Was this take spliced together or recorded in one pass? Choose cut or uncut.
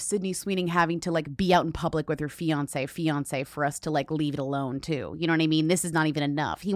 cut